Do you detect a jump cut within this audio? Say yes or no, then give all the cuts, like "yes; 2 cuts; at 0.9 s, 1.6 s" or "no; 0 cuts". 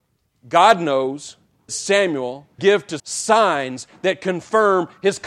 yes; 3 cuts; at 1.7 s, 2.6 s, 3.0 s